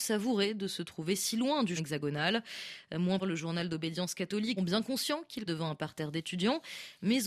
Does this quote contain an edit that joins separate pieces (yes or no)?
yes